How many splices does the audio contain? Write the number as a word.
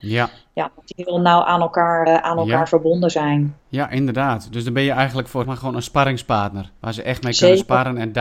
five